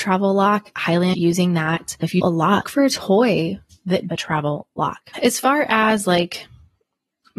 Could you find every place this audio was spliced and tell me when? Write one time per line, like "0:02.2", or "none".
0:01.1
0:02.2
0:02.6
0:04.1